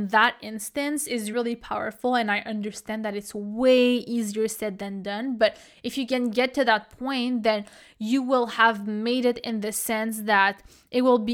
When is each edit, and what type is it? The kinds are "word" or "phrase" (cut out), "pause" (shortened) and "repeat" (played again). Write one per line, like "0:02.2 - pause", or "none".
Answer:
0:01.3 - word